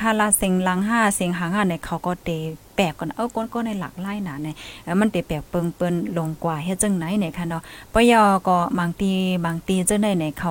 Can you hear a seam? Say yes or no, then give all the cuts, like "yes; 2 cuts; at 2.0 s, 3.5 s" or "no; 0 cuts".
no; 0 cuts